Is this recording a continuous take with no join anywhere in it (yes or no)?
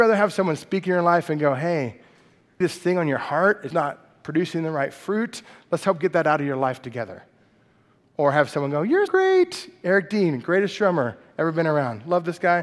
no